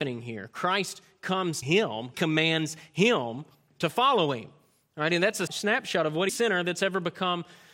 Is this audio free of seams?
no; 5 cuts; at 1.6 s, 2.1 s, 3.7 s, 5.5 s, 6.3 s

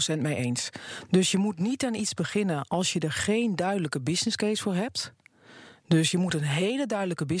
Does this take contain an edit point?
no; 0 cuts

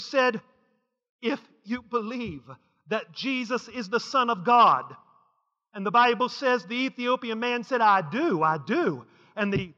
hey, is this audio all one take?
yes; 0 cuts

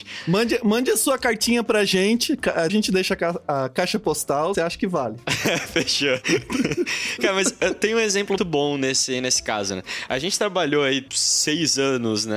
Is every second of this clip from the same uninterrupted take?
no; 3 cuts; at 2.7 s, 4.5 s, 8.4 s

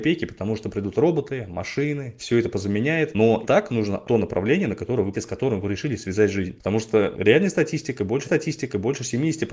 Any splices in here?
yes; 5 cuts; at 2.2 s, 3.4 s, 4.0 s, 5.1 s, 8.2 s

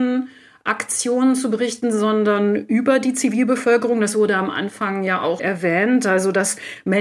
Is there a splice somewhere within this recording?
yes; 1 cut; at 5.4 s

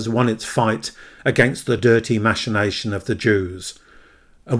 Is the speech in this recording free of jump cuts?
yes; 0 cuts

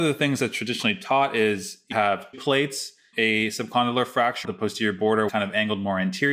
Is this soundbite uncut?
no; 5 cuts; at 1.9 s, 2.3 s, 3.1 s, 4.4 s, 5.3 s

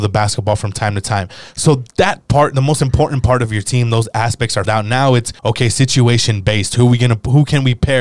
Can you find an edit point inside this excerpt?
yes; 2 cuts; at 4.7 s, 5.4 s

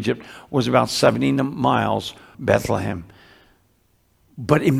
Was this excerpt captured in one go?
no; 1 cut; at 2.3 s

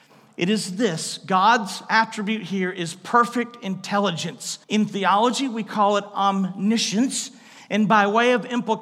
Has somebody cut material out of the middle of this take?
yes; 1 cut; at 4.6 s

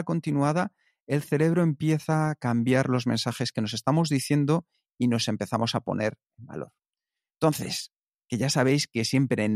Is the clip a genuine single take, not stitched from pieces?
yes; 0 cuts

